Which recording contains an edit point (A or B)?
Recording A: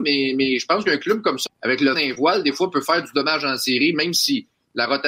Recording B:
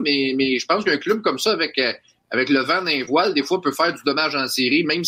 A